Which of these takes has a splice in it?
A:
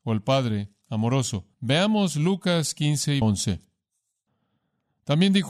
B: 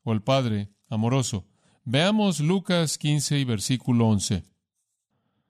A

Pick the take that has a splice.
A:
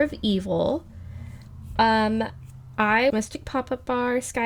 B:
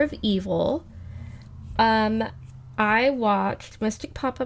A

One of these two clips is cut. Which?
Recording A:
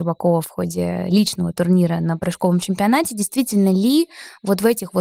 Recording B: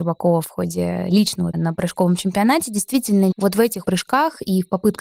B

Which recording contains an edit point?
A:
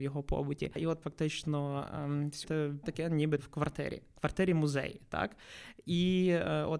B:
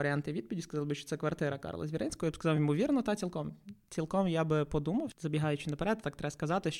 A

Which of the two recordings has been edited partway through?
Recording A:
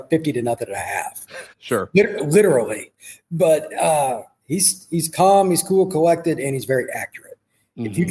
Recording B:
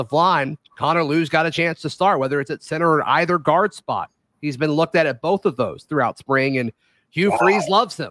A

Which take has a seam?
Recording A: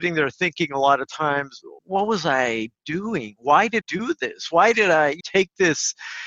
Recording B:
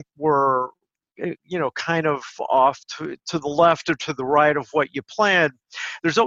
A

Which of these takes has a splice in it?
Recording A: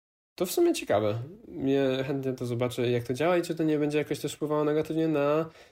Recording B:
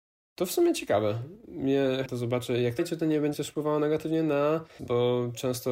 B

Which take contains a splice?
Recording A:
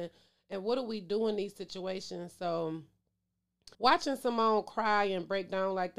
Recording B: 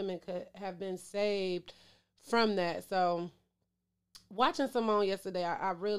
A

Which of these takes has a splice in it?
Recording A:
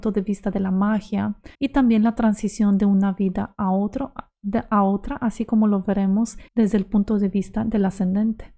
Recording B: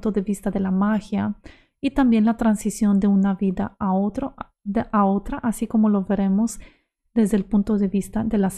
A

